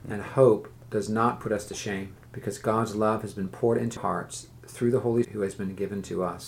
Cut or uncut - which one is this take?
cut